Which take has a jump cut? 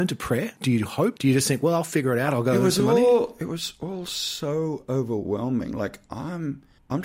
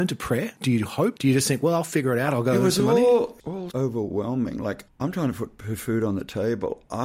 second; 3 cuts; at 3.4 s, 3.7 s, 4.9 s

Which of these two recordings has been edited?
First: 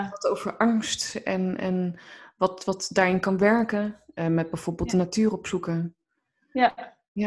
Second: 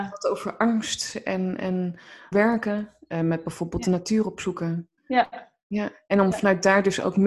second; 2 cuts; at 2.3 s, 5.0 s

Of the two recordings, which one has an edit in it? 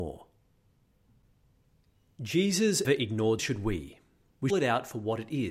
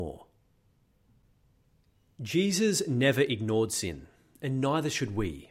first; 3 cuts; at 2.8 s, 3.4 s, 4.5 s

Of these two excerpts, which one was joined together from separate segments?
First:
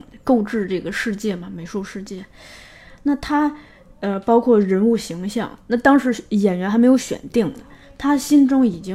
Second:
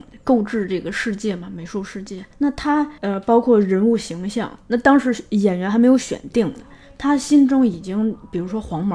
second; 2 cuts; at 2.3 s, 3.0 s

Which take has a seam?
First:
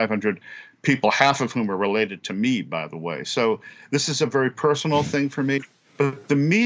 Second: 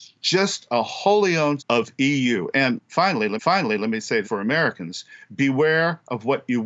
second; 3 cuts; at 1.6 s, 3.4 s, 4.2 s

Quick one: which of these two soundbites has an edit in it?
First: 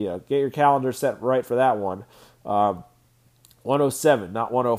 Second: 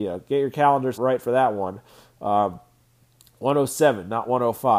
second; 1 cut; at 0.9 s

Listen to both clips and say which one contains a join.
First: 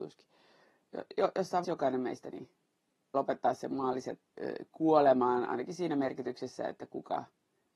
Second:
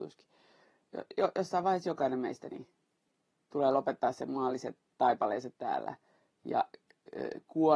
first; 3 cuts; at 1.6 s, 3.1 s, 4.3 s

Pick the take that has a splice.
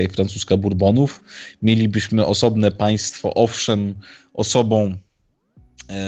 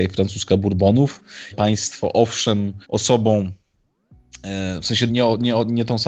second; 3 cuts; at 1.5 s, 2.8 s, 5.1 s

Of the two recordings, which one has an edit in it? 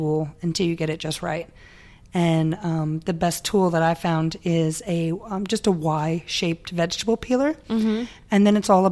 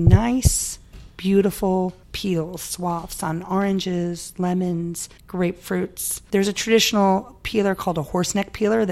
second; 2 cuts; at 2.0 s, 5.2 s

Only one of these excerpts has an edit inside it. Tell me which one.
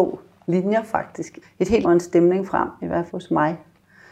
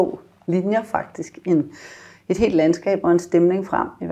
first; 3 cuts; at 1.4 s, 1.8 s, 3.1 s

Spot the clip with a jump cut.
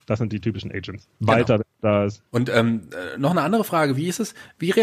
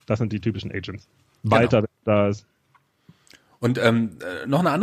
first; 2 cuts; at 1.1 s, 2.3 s

